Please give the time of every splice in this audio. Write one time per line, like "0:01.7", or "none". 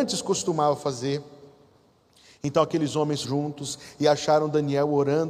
0:03.2